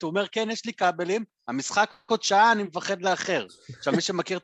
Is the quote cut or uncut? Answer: uncut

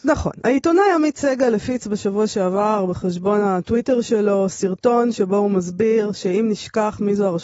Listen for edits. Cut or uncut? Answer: uncut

